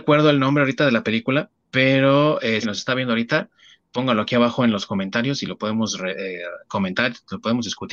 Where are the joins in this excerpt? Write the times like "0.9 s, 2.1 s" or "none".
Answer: 1.6 s, 2.6 s